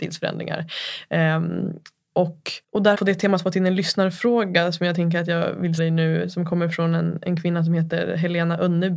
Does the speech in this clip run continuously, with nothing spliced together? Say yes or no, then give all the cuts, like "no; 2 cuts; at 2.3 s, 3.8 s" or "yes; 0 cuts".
no; 3 cuts; at 2.6 s, 2.9 s, 5.8 s